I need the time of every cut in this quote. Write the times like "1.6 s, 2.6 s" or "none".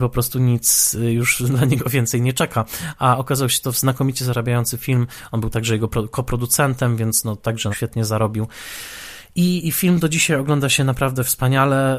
7.7 s, 9.6 s